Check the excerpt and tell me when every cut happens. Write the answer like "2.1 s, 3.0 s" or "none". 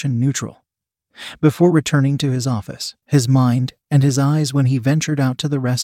3.0 s